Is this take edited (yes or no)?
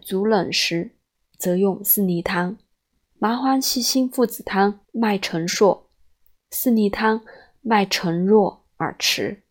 yes